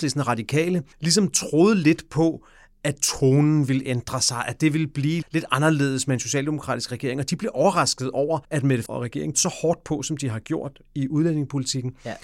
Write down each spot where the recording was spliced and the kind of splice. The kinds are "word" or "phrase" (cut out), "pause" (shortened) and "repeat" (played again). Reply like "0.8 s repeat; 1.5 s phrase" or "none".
0.9 s pause; 5.2 s word; 8.4 s pause; 8.9 s word; 9.3 s word